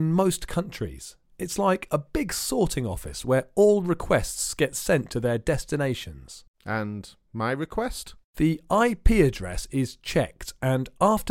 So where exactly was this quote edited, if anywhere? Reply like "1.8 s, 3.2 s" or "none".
6.5 s, 8.2 s